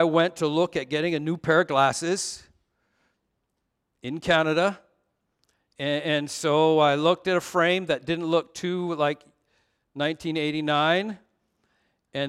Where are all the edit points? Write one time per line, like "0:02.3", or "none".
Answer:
none

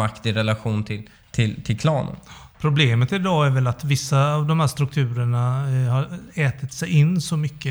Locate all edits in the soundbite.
0:01.1
0:02.5

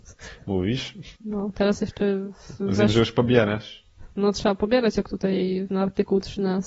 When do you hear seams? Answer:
0:01.2
0:05.7

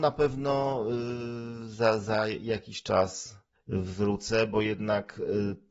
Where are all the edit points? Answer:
0:03.5

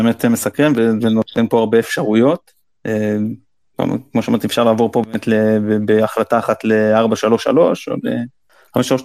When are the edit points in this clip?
none

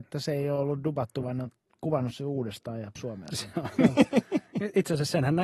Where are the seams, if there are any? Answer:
0:01.2
0:03.0

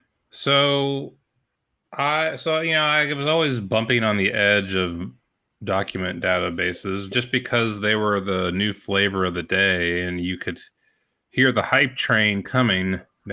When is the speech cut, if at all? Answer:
none

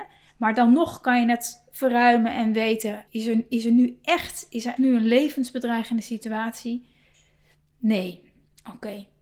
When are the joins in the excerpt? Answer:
0:03.1
0:04.8

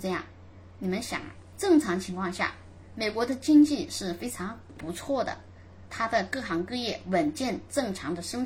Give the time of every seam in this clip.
0:05.9

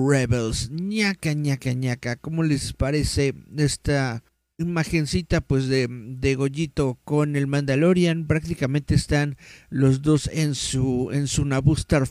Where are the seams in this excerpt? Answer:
0:04.3

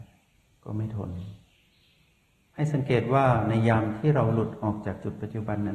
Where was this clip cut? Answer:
none

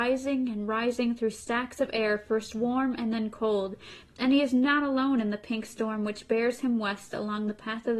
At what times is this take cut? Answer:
none

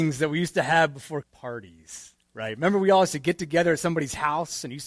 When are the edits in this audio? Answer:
0:01.2

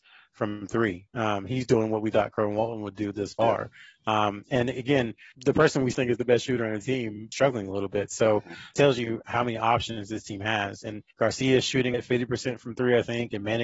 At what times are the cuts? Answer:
0:05.3
0:05.9
0:07.3
0:08.7
0:11.1
0:11.9

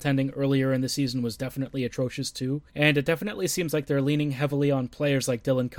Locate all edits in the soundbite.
0:02.7

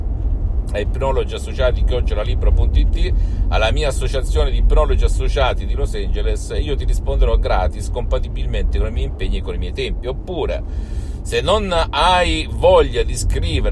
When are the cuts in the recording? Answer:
none

